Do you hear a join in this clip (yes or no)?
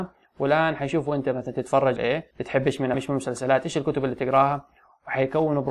yes